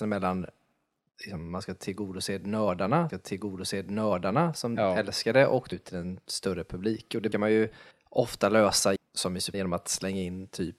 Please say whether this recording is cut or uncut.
cut